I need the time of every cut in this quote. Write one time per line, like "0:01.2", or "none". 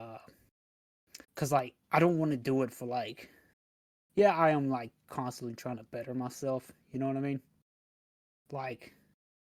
0:01.2
0:01.8
0:03.5